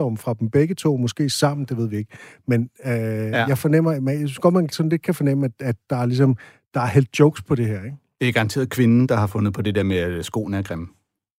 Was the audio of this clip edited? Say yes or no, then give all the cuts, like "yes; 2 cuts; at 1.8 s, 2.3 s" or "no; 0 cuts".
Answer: no; 0 cuts